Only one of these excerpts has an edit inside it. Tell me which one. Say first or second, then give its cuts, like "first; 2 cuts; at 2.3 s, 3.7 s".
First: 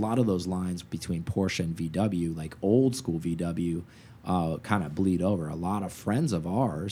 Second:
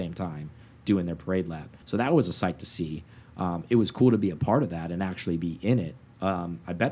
second; 1 cut; at 1.8 s